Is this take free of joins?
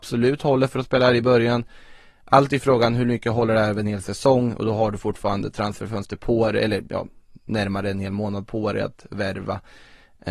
yes; 0 cuts

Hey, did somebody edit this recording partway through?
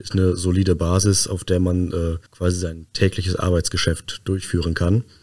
yes; 1 cut; at 2.3 s

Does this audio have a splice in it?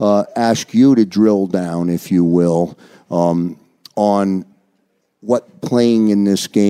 no; 0 cuts

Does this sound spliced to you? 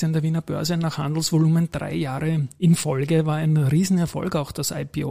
no; 0 cuts

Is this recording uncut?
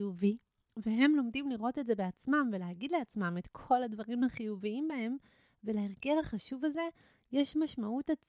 yes; 0 cuts

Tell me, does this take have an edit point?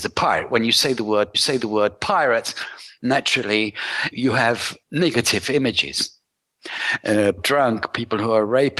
yes; 4 cuts; at 1.3 s, 4.1 s, 4.8 s, 7.4 s

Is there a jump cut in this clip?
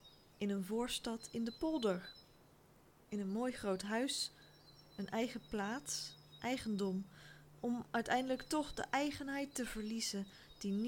no; 0 cuts

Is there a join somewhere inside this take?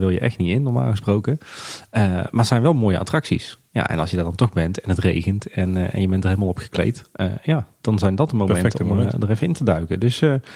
no; 0 cuts

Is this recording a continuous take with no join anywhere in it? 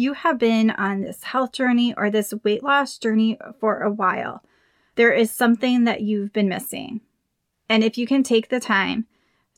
yes; 0 cuts

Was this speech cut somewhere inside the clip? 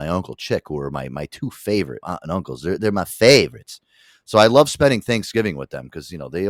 yes; 1 cut; at 2.0 s

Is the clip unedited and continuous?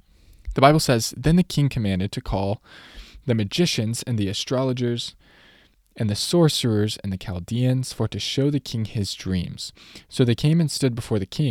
yes; 0 cuts

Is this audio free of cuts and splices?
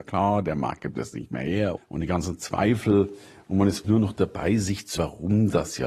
no; 3 cuts; at 1.8 s, 3.8 s, 5.0 s

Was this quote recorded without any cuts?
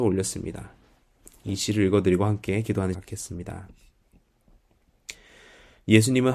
no; 1 cut; at 2.9 s

